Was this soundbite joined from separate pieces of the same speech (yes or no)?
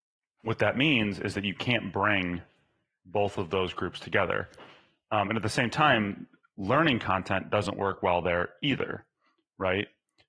no